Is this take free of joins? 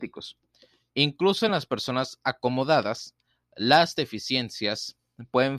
yes; 0 cuts

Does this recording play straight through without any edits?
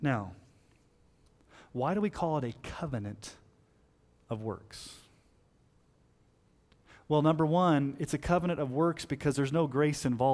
yes; 0 cuts

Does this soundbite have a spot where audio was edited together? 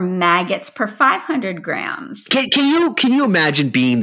no; 0 cuts

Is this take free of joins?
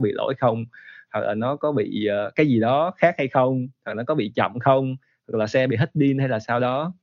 yes; 0 cuts

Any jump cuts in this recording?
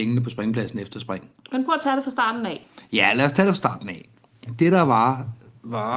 no; 0 cuts

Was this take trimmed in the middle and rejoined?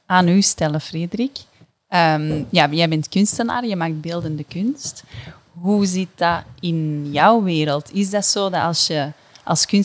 no; 0 cuts

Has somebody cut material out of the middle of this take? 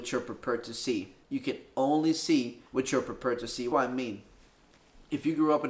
yes; 3 cuts; at 1.2 s, 2.7 s, 3.7 s

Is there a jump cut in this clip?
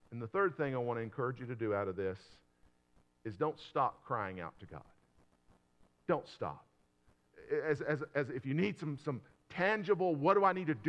no; 0 cuts

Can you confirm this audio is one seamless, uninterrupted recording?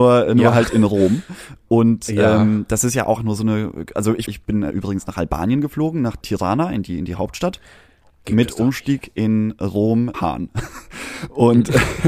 no; 5 cuts; at 3.2 s, 4.3 s, 6.2 s, 8.2 s, 10.1 s

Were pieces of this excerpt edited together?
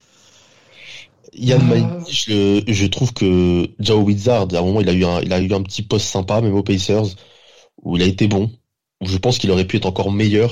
no; 0 cuts

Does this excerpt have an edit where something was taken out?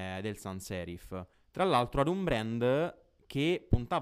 yes; 1 cut; at 1.3 s

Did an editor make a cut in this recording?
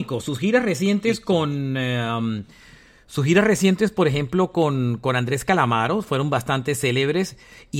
no; 0 cuts

